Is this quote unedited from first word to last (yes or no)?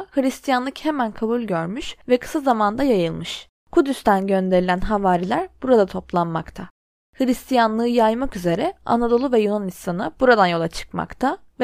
yes